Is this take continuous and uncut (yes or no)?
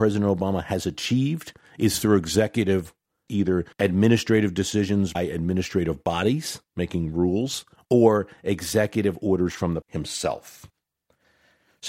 no